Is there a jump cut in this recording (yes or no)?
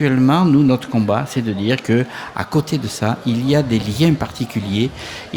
no